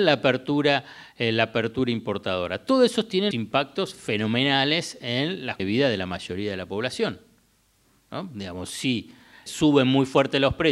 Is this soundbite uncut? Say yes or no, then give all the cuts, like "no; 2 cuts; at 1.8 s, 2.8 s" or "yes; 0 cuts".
no; 3 cuts; at 3.3 s, 5.6 s, 9.5 s